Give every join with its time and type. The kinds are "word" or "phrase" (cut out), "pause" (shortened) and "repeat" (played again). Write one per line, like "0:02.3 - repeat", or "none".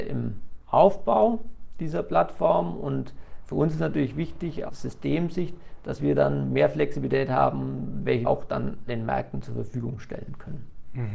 0:04.7 - word
0:08.2 - word
0:08.9 - word